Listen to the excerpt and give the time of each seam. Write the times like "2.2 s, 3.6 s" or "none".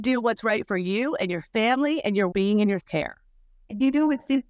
2.3 s, 2.8 s